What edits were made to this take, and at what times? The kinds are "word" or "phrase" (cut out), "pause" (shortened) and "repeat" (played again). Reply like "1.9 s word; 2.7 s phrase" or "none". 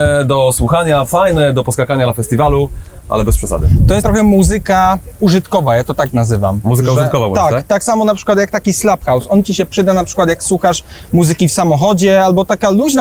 4.0 s word